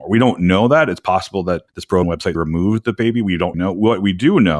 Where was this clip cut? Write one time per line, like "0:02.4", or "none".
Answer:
0:01.7
0:02.0
0:02.3
0:03.5